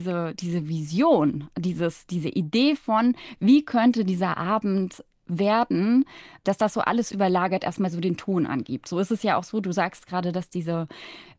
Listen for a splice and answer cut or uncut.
uncut